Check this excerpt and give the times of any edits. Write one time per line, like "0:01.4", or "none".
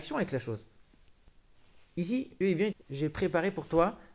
0:02.4
0:02.7